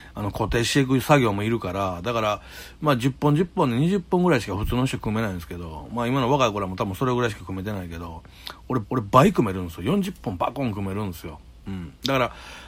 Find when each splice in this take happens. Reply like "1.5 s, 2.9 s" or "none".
8.8 s